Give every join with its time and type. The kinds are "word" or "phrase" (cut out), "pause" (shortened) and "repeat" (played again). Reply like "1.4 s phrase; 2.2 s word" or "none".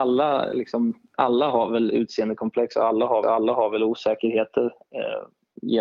1.1 s word; 3.2 s repeat